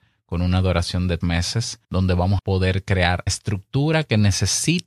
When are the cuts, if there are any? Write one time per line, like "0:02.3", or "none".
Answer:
0:01.2
0:01.8
0:02.4
0:03.3